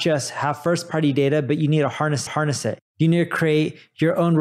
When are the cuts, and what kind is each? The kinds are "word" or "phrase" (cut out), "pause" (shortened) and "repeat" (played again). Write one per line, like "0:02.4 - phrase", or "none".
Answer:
0:02.3 - repeat